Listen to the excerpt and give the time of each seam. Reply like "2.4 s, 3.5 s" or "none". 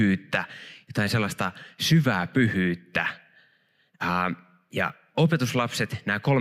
none